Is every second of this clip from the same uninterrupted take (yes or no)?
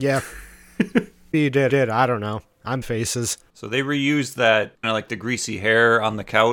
no